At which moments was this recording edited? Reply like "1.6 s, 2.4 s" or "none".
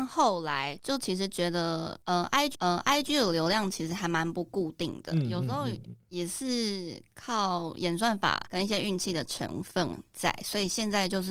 2.5 s